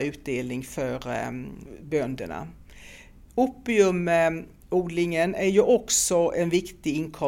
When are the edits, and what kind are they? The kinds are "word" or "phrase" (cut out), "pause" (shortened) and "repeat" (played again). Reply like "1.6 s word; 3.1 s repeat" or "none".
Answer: none